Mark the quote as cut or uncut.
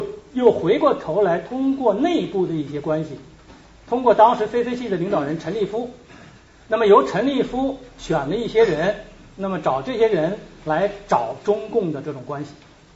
uncut